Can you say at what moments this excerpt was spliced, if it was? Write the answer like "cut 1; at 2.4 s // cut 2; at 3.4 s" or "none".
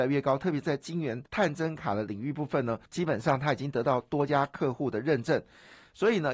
cut 1; at 1.3 s // cut 2; at 2.9 s